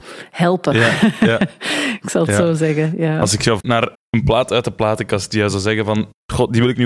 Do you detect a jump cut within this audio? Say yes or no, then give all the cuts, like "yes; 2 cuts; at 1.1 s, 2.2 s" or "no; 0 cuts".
yes; 2 cuts; at 3.6 s, 3.9 s